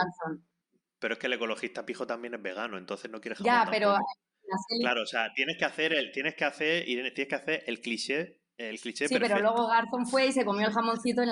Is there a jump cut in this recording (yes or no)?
no